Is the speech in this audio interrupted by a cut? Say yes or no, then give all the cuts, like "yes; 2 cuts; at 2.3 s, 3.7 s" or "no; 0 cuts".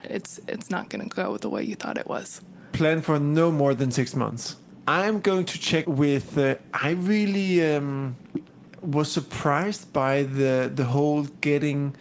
yes; 1 cut; at 5.8 s